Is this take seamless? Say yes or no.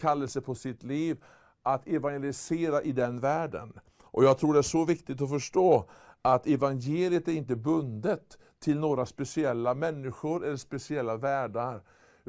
yes